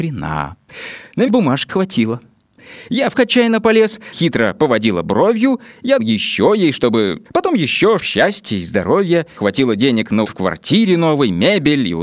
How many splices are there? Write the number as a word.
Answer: nine